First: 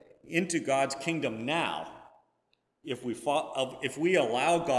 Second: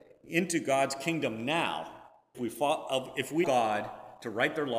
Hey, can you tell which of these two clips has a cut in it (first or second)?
second